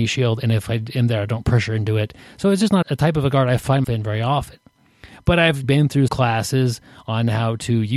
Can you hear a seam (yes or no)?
yes